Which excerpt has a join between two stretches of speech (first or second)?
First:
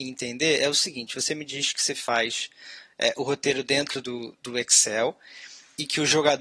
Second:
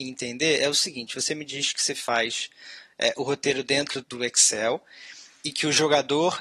second